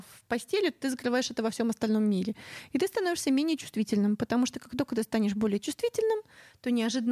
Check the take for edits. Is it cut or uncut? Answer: uncut